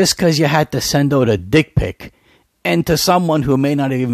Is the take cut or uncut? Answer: uncut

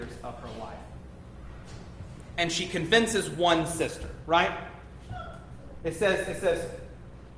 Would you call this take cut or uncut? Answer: uncut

